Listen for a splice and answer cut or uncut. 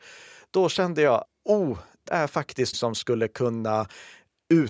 cut